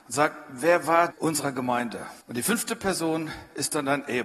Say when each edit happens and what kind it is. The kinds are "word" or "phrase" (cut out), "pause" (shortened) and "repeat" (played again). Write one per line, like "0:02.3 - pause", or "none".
0:01.1 - phrase
0:02.2 - pause